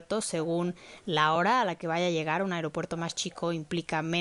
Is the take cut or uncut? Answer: uncut